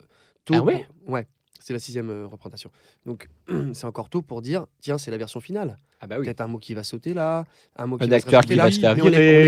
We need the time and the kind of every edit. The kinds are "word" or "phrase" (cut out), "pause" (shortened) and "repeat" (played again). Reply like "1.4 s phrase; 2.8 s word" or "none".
none